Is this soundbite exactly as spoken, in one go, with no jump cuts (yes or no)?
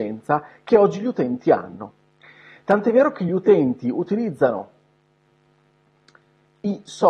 yes